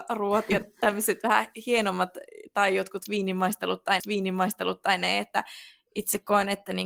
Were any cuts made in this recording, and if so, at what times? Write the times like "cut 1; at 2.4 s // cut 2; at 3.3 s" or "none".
cut 1; at 4.0 s